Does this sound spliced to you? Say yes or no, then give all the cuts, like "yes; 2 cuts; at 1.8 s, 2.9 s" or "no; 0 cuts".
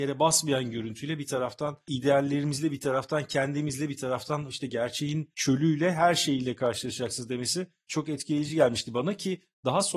no; 0 cuts